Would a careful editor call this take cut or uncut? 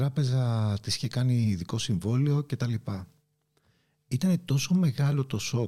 uncut